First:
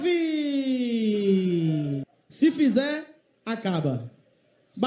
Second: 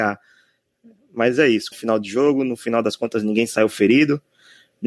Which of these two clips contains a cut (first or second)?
second